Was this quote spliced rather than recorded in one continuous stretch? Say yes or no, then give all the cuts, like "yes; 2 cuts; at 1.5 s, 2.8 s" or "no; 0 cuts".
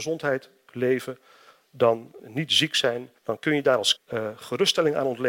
yes; 3 cuts; at 2.2 s, 3.2 s, 4.0 s